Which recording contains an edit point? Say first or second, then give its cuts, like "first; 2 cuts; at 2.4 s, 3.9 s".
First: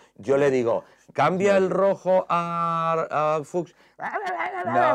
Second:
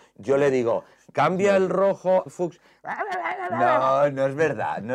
second; 1 cut; at 2.3 s